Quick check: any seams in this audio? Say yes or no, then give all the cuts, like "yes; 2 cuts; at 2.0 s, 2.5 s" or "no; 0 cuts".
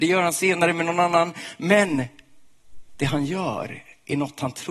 no; 0 cuts